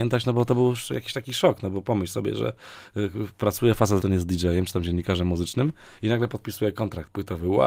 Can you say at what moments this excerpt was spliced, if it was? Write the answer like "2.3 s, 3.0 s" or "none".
none